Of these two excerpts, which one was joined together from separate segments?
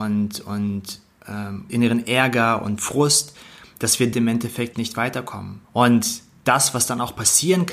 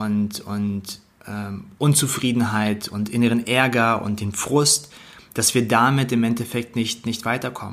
first; 5 cuts; at 1.7 s, 2.8 s, 4.1 s, 4.7 s, 5.6 s

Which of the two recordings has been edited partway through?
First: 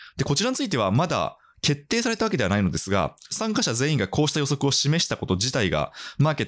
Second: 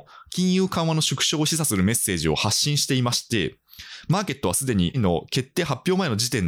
second; 1 cut; at 4.9 s

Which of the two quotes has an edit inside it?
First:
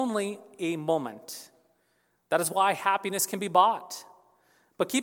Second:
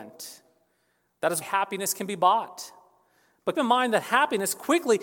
second; 2 cuts; at 1.4 s, 3.5 s

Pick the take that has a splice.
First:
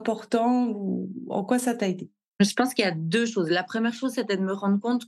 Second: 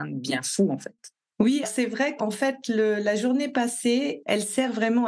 second; 2 cuts; at 1.6 s, 2.2 s

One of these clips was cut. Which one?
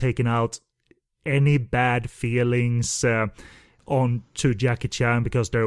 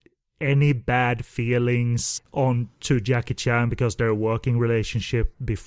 second; 1 cut; at 2.2 s

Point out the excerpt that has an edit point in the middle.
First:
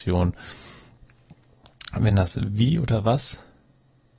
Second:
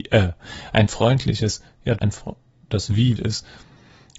second; 2 cuts; at 2.0 s, 3.2 s

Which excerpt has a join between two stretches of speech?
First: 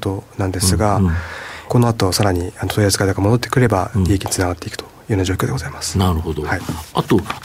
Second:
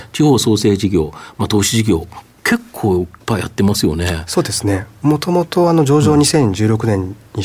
first; 1 cut; at 1.7 s

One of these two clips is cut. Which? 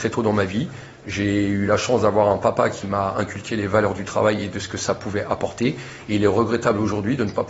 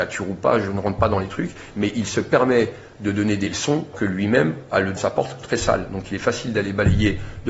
second; 2 cuts; at 3.9 s, 5.0 s

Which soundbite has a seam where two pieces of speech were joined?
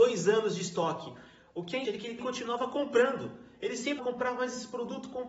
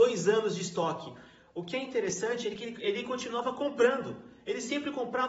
first; 3 cuts; at 1.8 s, 2.2 s, 4.0 s

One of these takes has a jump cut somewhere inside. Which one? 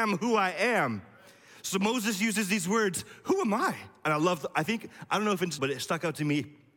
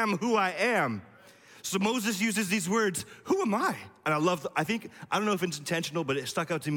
first; 1 cut; at 5.6 s

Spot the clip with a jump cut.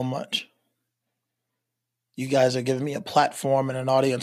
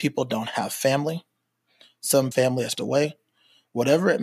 second; 2 cuts; at 2.3 s, 2.7 s

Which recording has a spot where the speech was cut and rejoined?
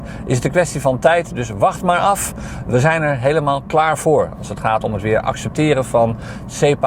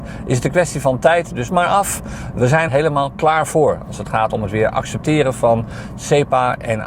second; 2 cuts; at 1.5 s, 2.7 s

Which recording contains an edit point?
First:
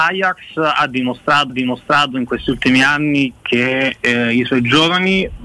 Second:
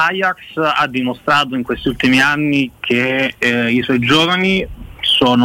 first; 1 cut; at 1.5 s

